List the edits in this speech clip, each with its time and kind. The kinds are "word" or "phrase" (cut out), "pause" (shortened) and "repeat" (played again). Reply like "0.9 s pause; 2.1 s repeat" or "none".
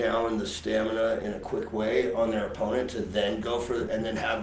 none